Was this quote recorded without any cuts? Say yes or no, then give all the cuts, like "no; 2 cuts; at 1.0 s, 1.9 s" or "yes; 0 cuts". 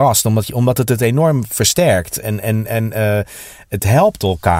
yes; 0 cuts